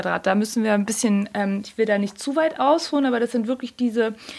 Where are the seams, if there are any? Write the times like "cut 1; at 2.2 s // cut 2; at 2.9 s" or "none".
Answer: none